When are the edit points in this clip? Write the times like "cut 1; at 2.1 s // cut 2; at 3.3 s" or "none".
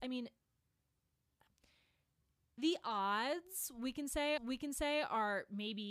cut 1; at 4.4 s